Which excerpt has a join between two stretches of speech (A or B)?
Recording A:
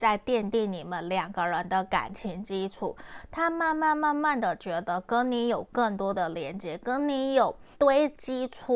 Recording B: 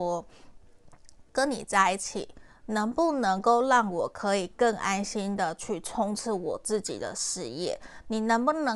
A